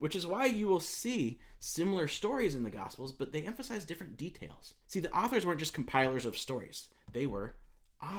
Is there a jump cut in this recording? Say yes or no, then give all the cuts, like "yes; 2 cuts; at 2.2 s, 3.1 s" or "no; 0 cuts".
yes; 1 cut; at 4.8 s